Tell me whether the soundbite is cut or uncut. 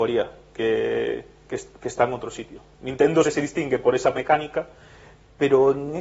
cut